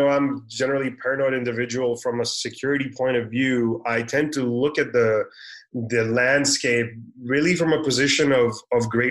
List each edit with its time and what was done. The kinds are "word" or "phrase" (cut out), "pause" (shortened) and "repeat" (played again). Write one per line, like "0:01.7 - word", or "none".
none

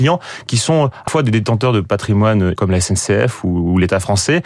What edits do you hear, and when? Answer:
0:01.1 - word
0:02.6 - word

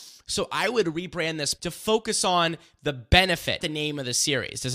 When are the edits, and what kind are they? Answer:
0:01.5 - word
0:03.6 - word

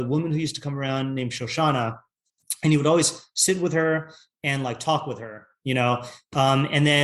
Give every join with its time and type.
none

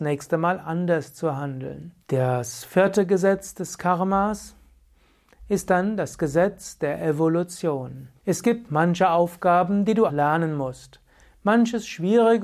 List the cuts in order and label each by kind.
0:02.0 - pause
0:08.2 - pause
0:10.1 - word

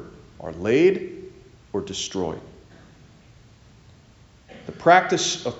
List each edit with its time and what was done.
0:01.5 - pause

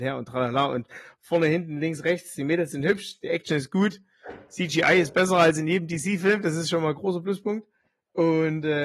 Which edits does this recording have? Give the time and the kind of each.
none

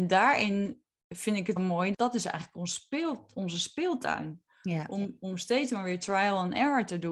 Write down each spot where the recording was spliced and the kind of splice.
0:01.6 - word
0:01.9 - word

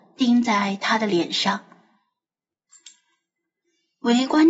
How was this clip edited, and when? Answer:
none

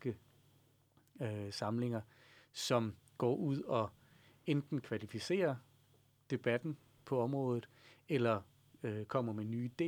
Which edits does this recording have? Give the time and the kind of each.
none

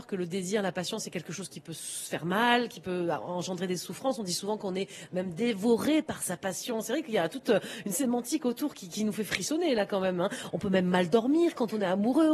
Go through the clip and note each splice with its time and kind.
none

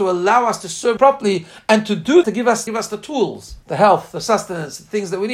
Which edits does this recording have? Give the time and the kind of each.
0:01.0 - word
0:02.2 - word
0:02.7 - phrase
0:03.6 - pause

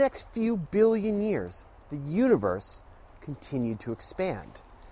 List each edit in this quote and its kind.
none

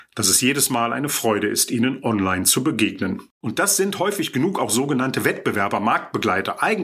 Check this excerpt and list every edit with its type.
none

